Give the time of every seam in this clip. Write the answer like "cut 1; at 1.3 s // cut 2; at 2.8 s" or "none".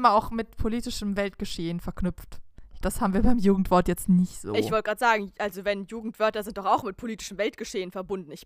cut 1; at 2.8 s